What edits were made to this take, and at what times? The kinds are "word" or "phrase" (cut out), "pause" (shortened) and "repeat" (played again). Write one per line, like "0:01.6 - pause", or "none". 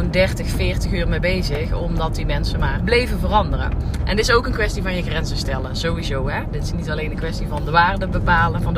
0:02.8 - word